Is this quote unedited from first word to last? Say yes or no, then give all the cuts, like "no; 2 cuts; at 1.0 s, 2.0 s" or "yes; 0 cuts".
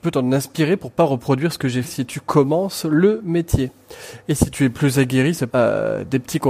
no; 2 cuts; at 1.8 s, 5.5 s